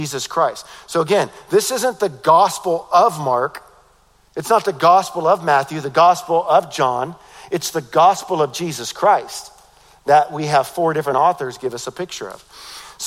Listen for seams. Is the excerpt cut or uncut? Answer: uncut